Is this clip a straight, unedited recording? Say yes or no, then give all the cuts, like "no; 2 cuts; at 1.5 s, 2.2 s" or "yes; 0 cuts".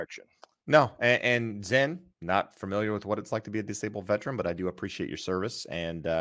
no; 1 cut; at 2.1 s